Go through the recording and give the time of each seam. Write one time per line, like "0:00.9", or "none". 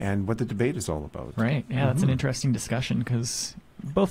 none